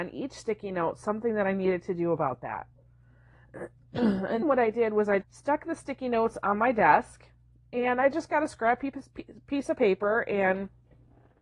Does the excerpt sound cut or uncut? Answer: cut